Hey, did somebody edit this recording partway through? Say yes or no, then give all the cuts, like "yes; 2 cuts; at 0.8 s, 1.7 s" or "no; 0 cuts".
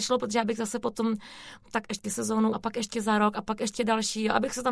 yes; 1 cut; at 2.5 s